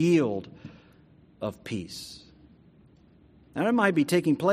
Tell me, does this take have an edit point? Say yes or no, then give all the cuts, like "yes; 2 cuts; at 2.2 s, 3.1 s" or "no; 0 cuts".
no; 0 cuts